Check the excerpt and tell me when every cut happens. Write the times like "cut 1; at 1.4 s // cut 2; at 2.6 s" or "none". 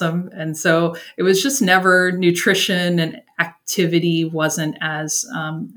none